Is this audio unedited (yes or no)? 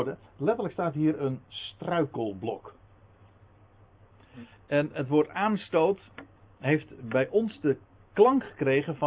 yes